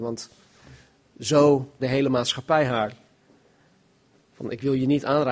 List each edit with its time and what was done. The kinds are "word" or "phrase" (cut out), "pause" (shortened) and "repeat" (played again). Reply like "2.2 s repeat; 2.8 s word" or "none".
1.8 s word